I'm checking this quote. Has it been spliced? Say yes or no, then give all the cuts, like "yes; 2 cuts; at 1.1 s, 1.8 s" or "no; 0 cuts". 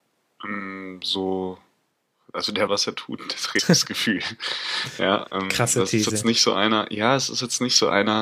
yes; 2 cuts; at 2.7 s, 3.6 s